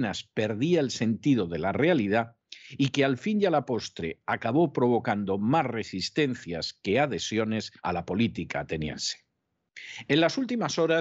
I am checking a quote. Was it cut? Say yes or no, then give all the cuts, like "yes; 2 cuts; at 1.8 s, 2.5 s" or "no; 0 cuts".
yes; 1 cut; at 7.8 s